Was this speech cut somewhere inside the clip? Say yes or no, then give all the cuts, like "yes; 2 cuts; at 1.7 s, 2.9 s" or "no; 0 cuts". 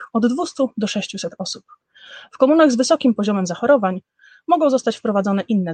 no; 0 cuts